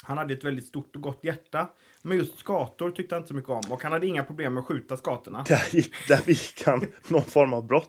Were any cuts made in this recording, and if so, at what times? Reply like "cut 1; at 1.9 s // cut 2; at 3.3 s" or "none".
none